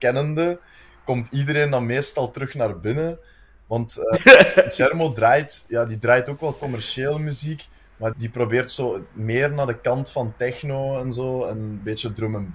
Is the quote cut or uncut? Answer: cut